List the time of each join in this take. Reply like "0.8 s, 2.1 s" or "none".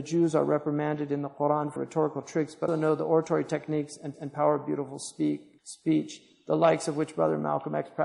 1.8 s, 2.7 s, 4.1 s, 5.6 s